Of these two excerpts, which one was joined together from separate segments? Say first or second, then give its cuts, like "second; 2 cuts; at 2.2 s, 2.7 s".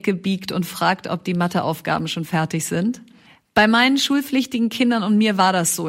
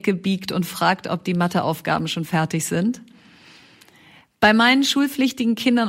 first; 1 cut; at 3.3 s